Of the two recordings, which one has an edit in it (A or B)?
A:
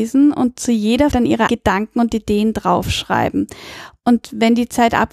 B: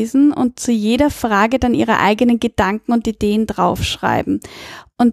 A